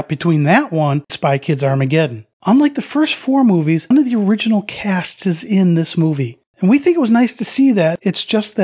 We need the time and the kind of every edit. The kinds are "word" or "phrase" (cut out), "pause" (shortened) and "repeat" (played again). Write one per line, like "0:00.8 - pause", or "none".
0:01.1 - word
0:02.3 - pause
0:03.9 - word
0:06.5 - pause

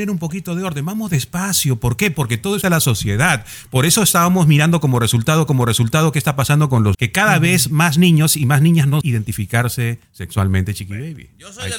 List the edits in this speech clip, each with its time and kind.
0:02.6 - word
0:05.5 - repeat
0:06.9 - word
0:09.0 - word
0:10.0 - pause

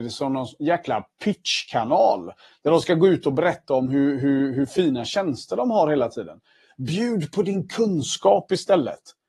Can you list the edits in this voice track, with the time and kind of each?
none

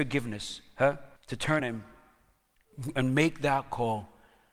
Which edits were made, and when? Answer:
0:01.2 - pause
0:01.6 - word

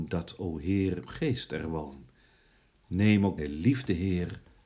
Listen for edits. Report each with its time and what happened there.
0:01.1 - word
0:03.4 - word

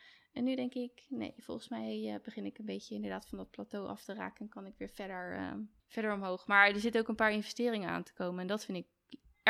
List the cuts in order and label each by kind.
0:05.8 - pause

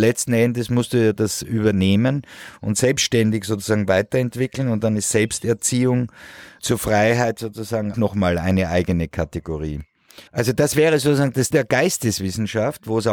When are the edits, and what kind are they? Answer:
0:06.6 - word
0:07.9 - word
0:10.3 - pause
0:11.5 - word

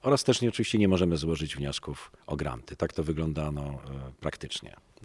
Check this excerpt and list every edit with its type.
0:02.2 - pause

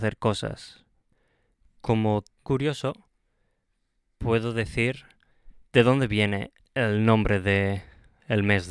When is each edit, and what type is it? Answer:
0:02.4 - word
0:05.6 - pause
0:06.6 - pause

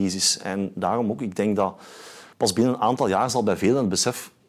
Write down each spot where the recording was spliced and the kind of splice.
0:02.3 - pause

